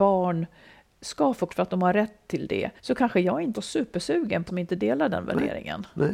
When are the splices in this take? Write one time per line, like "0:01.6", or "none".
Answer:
0:01.5
0:02.8
0:03.5
0:04.5